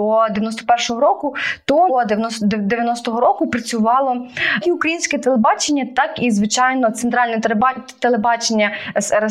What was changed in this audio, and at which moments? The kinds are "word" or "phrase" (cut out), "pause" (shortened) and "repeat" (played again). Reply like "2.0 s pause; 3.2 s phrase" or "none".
1.9 s phrase; 4.6 s word